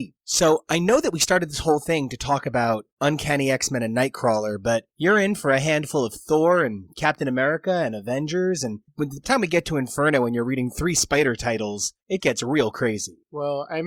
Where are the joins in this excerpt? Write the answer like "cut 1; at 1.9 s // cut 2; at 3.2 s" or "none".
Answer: cut 1; at 9.2 s // cut 2; at 12.2 s